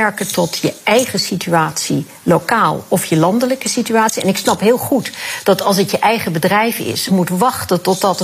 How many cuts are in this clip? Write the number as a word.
one